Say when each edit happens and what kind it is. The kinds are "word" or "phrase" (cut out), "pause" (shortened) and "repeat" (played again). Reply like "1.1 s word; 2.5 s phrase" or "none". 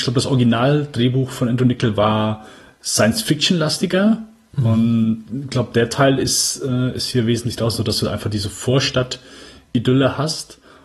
none